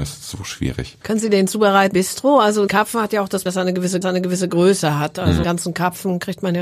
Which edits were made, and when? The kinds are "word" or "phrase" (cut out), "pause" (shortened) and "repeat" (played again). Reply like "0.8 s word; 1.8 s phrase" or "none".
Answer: 1.0 s pause; 1.9 s word; 2.7 s word; 3.5 s word; 4.0 s repeat; 5.4 s word